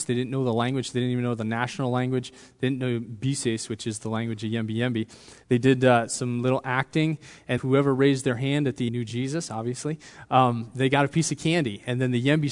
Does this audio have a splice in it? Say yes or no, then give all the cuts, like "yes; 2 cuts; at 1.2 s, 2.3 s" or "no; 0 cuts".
yes; 2 cuts; at 7.6 s, 8.9 s